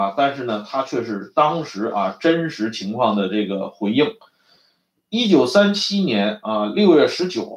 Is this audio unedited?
yes; 0 cuts

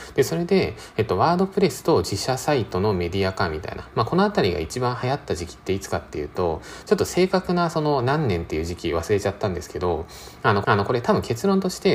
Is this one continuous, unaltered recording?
no; 1 cut; at 10.6 s

